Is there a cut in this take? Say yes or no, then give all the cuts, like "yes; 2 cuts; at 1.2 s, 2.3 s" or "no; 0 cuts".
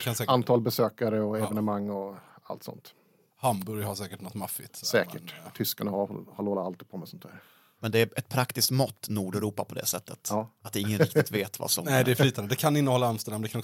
no; 0 cuts